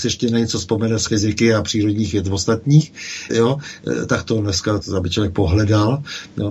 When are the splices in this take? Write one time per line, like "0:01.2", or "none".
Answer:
0:01.1
0:03.3
0:04.8